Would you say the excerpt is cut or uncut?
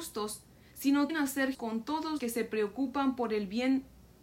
cut